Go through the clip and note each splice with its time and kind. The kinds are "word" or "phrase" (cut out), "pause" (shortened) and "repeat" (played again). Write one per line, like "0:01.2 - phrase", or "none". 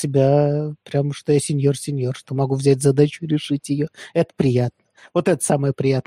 none